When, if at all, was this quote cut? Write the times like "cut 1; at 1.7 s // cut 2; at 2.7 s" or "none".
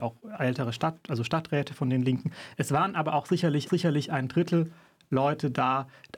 cut 1; at 3.7 s

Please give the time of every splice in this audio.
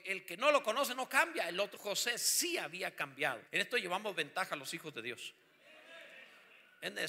cut 1; at 1.8 s // cut 2; at 3.5 s

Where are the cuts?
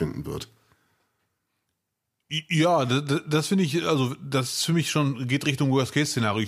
none

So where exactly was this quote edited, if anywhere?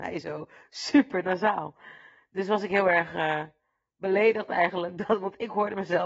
none

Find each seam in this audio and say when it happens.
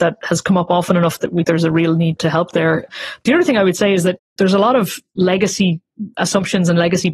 cut 1; at 1.4 s // cut 2; at 4.3 s

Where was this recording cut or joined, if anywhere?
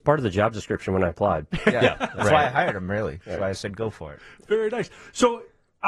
none

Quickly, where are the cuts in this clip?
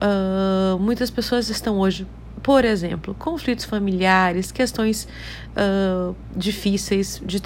none

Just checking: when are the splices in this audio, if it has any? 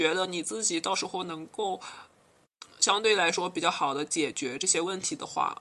cut 1; at 2.4 s

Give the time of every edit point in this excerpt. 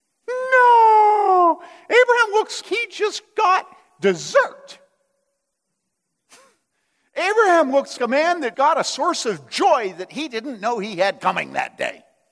cut 1; at 2.6 s // cut 2; at 8.0 s // cut 3; at 8.5 s

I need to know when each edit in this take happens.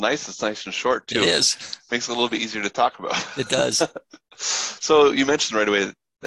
none

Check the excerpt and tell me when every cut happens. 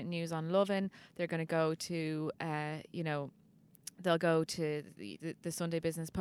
none

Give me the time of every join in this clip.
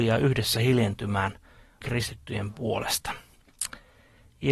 cut 1; at 1.8 s

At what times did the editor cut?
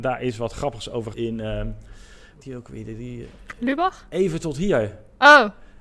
cut 1; at 1.1 s // cut 2; at 2.4 s

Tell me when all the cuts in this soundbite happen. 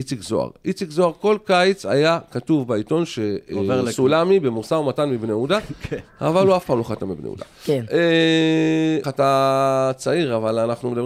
cut 1; at 9.0 s

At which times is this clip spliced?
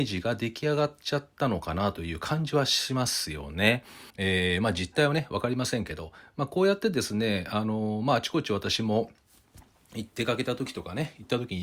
cut 1; at 4.1 s

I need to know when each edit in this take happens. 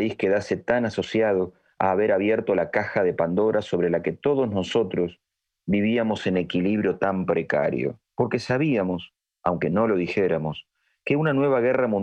cut 1; at 8.0 s

